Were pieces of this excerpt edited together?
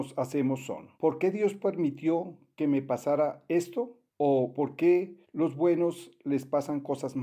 yes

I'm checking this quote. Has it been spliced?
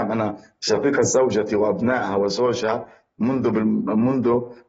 no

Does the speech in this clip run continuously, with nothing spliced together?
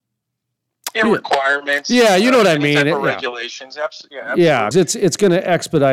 no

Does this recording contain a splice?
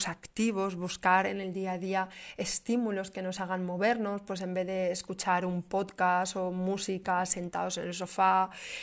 no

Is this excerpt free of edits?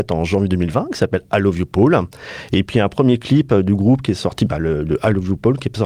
yes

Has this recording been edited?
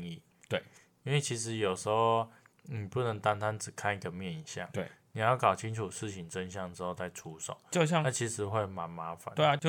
no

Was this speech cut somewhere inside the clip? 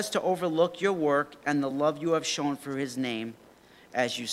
no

